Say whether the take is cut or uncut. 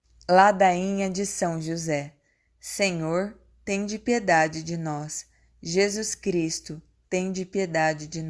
uncut